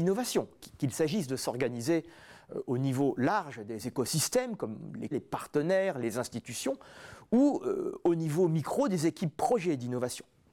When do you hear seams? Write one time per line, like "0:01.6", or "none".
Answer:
0:05.1